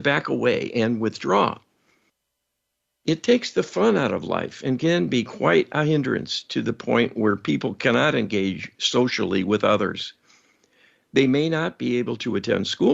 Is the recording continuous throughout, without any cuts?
yes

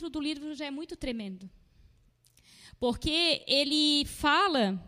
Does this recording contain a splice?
no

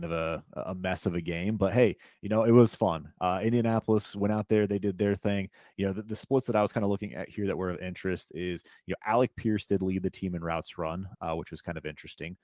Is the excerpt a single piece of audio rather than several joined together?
yes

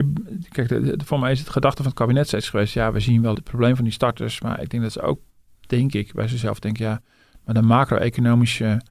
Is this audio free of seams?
no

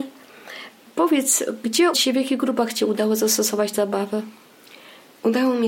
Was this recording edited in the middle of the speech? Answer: yes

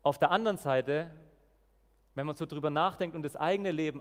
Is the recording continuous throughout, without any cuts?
yes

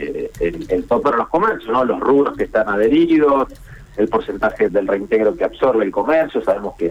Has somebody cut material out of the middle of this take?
yes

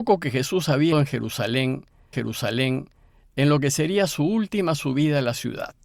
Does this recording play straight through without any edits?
no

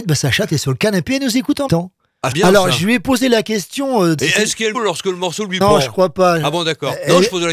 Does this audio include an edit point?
yes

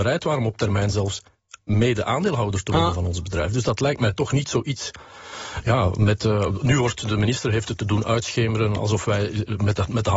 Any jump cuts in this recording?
no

